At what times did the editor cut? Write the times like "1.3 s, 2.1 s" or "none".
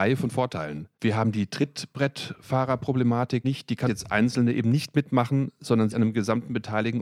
0.9 s, 3.4 s, 3.9 s, 5.9 s